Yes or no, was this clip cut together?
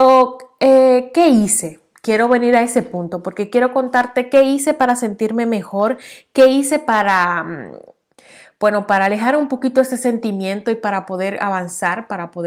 no